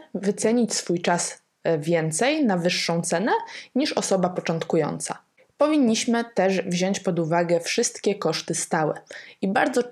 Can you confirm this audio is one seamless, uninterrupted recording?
yes; 0 cuts

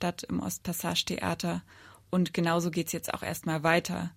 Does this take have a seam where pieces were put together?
no; 0 cuts

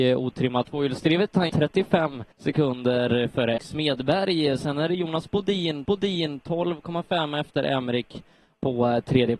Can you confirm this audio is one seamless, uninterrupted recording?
no; 4 cuts; at 1.5 s, 2.3 s, 3.6 s, 5.8 s

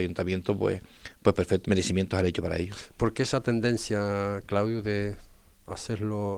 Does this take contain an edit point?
yes; 1 cut; at 1.6 s

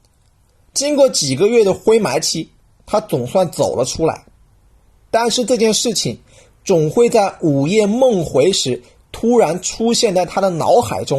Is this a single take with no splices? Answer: yes; 0 cuts

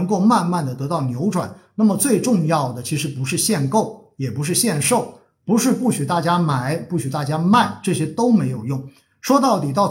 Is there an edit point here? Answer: no; 0 cuts

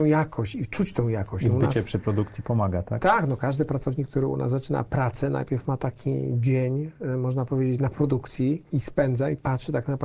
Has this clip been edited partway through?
no; 0 cuts

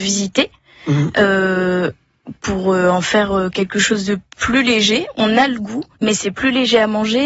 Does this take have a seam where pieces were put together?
yes; 1 cut; at 5.9 s

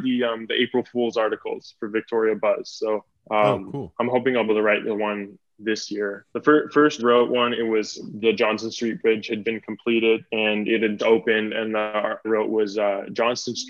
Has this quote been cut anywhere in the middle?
yes; 9 cuts; at 3.1 s, 4.5 s, 6.3 s, 7.0 s, 8.2 s, 9.4 s, 10.3 s, 11.0 s, 12.2 s

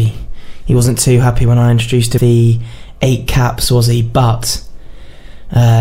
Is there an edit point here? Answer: yes; 1 cut; at 2.2 s

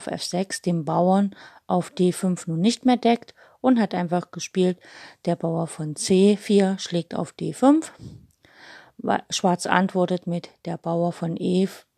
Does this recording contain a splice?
no; 0 cuts

